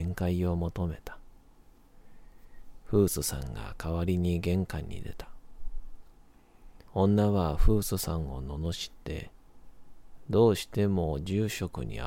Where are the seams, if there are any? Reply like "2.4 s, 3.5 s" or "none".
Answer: 6.8 s